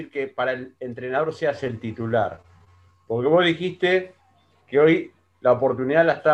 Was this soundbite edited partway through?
no; 0 cuts

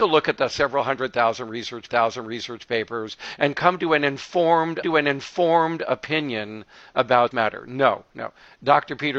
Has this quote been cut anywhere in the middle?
yes; 3 cuts; at 1.9 s, 4.8 s, 7.3 s

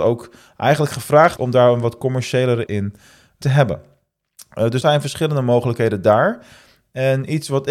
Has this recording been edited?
yes; 4 cuts; at 1.4 s, 2.7 s, 3.4 s, 4.8 s

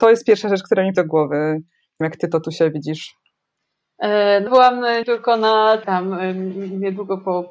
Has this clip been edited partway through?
yes; 5 cuts; at 0.9 s, 2.0 s, 4.5 s, 5.0 s, 5.8 s

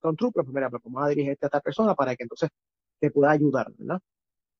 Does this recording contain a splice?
no; 0 cuts

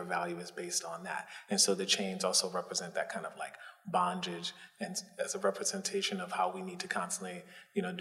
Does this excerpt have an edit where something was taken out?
no; 0 cuts

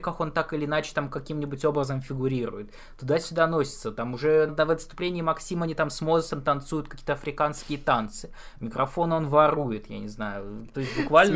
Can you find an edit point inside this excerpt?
yes; 1 cut; at 4.5 s

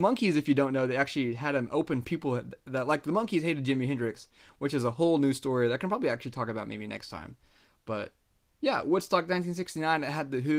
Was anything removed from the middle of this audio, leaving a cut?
yes; 1 cut; at 2.0 s

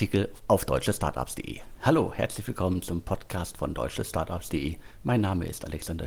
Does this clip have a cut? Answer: no; 0 cuts

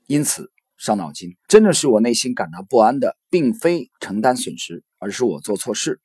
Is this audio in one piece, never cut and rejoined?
no; 2 cuts; at 1.4 s, 3.9 s

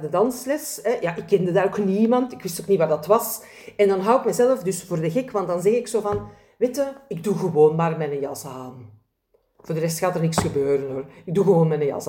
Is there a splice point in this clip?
no; 0 cuts

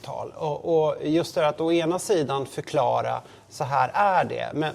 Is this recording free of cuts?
yes; 0 cuts

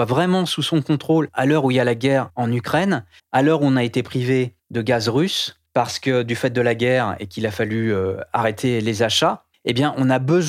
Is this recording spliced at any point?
yes; 3 cuts; at 3.2 s, 4.6 s, 9.5 s

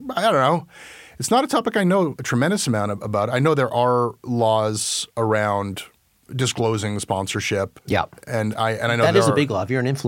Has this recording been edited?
no; 0 cuts

